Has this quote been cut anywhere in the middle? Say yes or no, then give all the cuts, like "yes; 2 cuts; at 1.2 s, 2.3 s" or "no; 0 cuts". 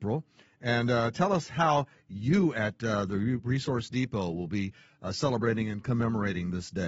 no; 0 cuts